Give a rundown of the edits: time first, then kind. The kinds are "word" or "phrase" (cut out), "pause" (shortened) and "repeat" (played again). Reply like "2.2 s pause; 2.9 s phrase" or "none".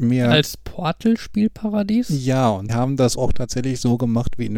2.7 s word; 3.2 s word